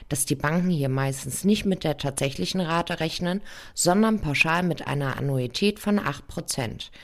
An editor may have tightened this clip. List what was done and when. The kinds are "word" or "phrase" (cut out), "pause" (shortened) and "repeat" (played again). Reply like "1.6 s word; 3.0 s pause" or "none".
none